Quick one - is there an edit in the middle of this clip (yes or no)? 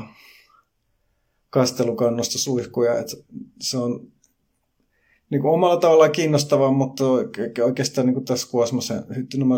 no